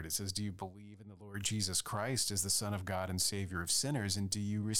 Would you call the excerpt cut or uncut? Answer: uncut